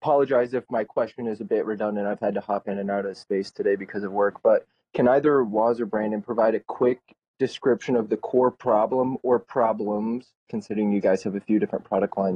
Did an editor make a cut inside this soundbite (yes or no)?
no